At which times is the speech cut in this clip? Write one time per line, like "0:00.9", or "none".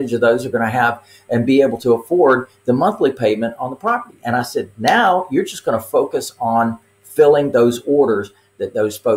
none